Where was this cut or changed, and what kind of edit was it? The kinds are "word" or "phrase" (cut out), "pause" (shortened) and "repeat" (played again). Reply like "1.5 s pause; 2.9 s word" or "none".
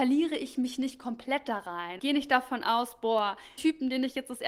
2.0 s word; 3.6 s word